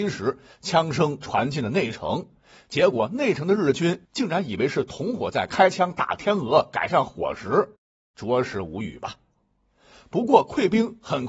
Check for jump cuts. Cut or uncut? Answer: cut